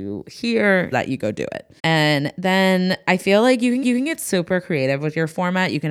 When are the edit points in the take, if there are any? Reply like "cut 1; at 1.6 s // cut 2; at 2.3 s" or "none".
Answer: cut 1; at 0.9 s // cut 2; at 1.8 s // cut 3; at 3.8 s